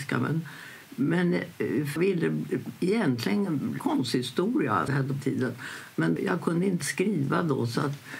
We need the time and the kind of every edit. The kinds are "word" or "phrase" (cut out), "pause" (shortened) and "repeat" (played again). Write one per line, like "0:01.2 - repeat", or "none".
0:02.0 - word
0:03.8 - word
0:04.9 - word
0:05.2 - word
0:06.2 - word
0:06.8 - word